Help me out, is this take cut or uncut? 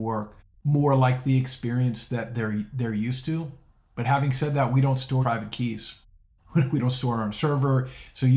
cut